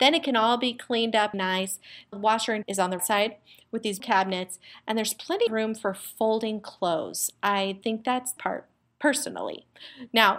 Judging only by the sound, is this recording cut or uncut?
cut